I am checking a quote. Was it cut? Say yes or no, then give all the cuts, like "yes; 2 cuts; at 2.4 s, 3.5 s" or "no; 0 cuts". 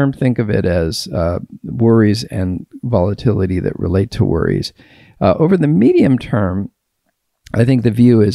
no; 0 cuts